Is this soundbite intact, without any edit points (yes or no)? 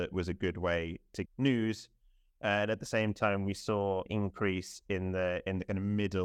no